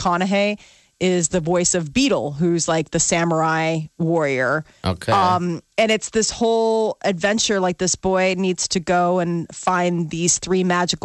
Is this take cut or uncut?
uncut